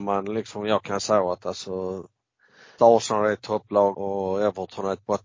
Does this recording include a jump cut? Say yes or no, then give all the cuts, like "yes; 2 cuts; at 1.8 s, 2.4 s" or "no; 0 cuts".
yes; 3 cuts; at 1.0 s, 2.8 s, 3.9 s